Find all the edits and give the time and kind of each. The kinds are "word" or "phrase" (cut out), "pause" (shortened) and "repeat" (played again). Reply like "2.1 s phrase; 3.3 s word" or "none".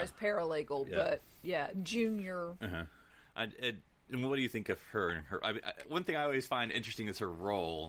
3.1 s pause